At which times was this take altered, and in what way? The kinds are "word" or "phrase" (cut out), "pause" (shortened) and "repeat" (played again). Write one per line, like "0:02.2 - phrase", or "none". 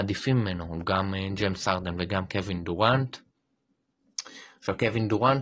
none